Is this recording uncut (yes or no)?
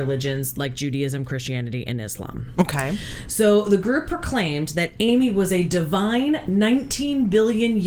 yes